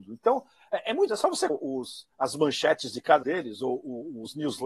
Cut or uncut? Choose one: cut